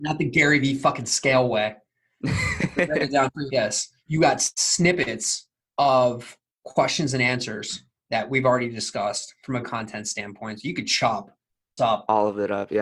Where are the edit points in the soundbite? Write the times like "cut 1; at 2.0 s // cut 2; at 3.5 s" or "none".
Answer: cut 1; at 3.5 s // cut 2; at 9.6 s // cut 3; at 11.8 s